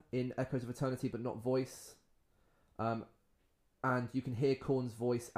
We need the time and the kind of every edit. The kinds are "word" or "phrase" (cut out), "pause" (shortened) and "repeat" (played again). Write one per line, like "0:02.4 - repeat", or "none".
none